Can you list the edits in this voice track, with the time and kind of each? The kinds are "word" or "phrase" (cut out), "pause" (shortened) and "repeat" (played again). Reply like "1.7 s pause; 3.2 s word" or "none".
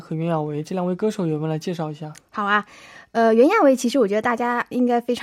none

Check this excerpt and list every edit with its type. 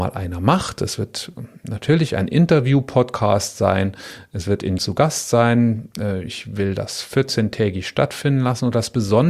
4.8 s phrase

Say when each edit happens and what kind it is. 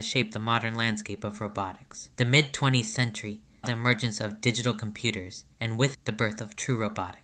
2.1 s pause; 3.6 s word; 5.5 s pause; 5.9 s word

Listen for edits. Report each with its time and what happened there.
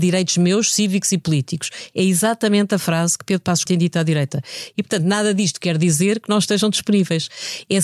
3.7 s word

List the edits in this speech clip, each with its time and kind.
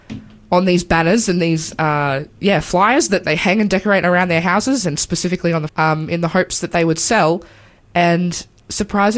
2.3 s pause; 3.2 s word; 5.7 s phrase

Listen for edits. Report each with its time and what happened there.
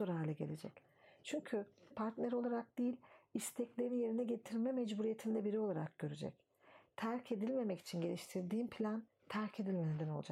1.9 s word

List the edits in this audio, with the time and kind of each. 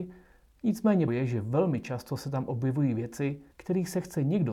1.1 s word; 3.5 s pause

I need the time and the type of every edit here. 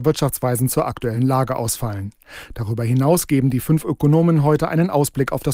none

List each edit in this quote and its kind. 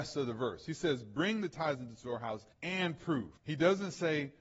2.5 s pause; 3.4 s pause

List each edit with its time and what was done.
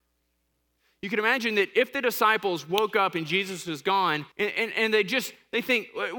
4.3 s pause

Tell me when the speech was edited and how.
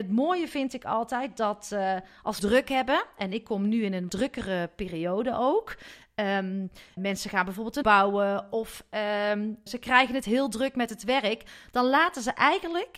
2.4 s word; 4.1 s word; 7.0 s word; 7.8 s word; 9.7 s word

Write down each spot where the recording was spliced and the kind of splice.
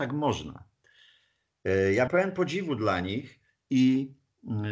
2.1 s word

